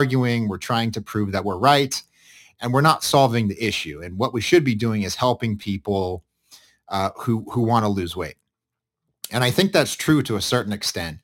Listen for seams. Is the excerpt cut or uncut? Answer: uncut